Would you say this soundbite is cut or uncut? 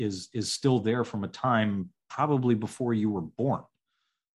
uncut